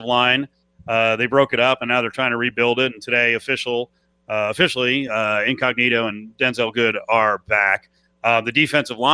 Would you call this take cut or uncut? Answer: uncut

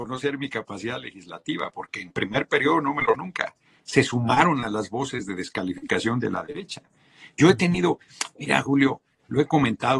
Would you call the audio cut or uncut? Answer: cut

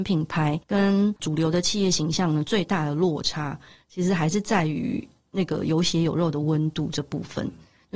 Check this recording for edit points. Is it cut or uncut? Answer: uncut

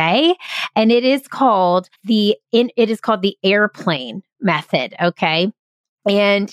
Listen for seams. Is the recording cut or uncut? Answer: cut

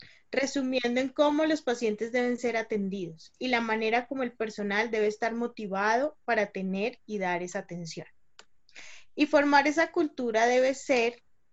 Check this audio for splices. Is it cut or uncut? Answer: uncut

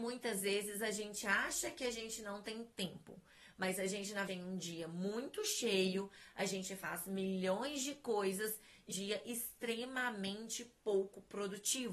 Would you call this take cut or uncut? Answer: cut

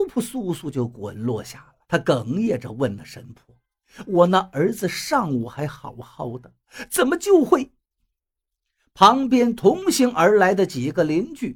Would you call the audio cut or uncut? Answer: cut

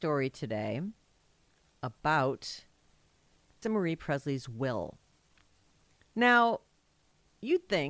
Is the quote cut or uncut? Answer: cut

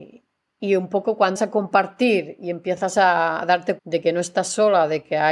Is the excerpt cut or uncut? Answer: cut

